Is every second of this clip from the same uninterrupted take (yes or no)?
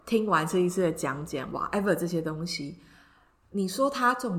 yes